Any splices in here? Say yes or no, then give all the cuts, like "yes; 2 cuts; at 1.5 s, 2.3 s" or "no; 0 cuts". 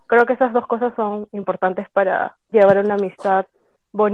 yes; 1 cut; at 2.5 s